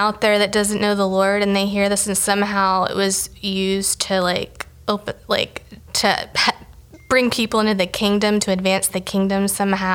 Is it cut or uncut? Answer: uncut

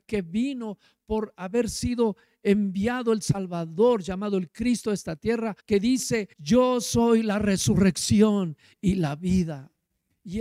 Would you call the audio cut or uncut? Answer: cut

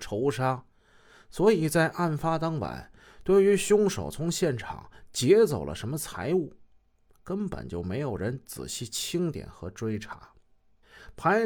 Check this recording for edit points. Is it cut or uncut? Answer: uncut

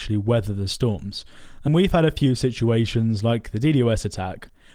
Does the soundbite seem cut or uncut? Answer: cut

